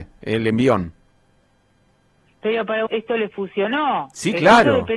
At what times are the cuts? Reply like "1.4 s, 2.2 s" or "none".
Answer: 2.9 s